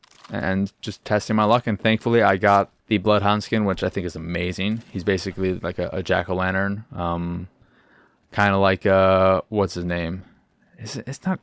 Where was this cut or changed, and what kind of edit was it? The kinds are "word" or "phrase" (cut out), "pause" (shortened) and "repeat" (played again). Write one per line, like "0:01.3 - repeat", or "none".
0:02.8 - pause